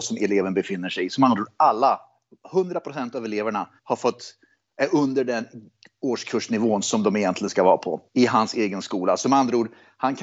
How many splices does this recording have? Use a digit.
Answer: 2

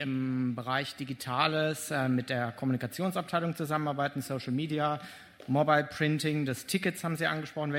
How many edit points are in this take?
0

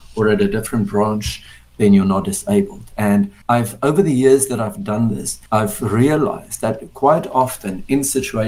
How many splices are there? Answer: 2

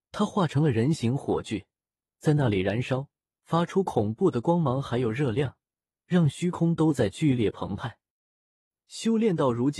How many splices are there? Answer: 0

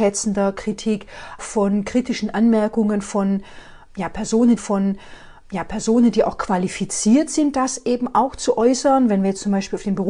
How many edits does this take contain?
2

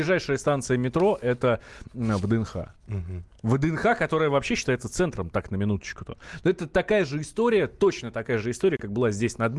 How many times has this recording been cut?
1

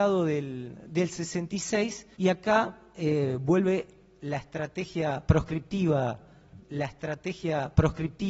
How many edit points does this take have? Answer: 2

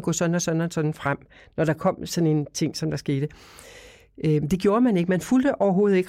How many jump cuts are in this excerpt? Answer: 0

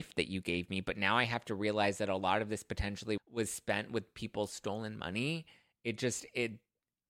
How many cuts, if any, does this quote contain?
1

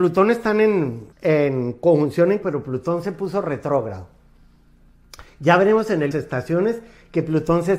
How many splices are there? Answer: 3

